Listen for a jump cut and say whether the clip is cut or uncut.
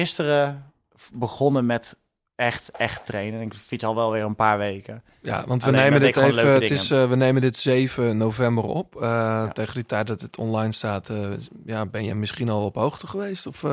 uncut